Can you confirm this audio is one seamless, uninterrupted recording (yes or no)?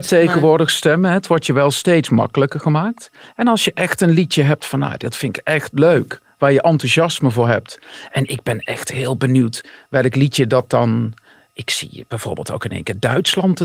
yes